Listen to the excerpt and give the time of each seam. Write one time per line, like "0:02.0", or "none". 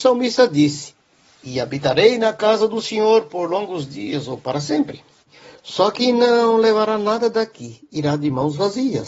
none